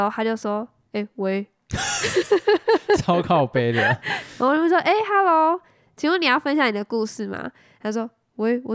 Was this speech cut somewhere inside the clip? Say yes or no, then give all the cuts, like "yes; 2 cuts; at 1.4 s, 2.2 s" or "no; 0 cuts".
no; 0 cuts